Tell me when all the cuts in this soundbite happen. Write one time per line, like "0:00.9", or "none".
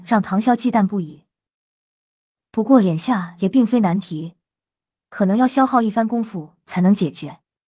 none